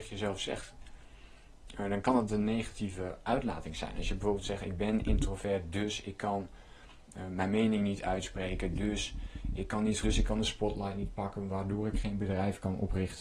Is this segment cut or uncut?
cut